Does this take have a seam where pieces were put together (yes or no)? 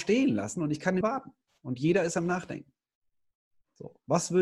yes